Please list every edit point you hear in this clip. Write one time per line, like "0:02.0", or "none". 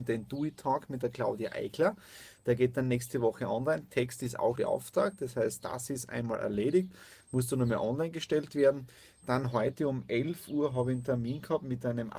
0:04.6